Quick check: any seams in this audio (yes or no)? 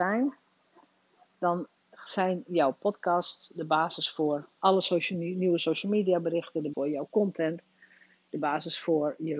yes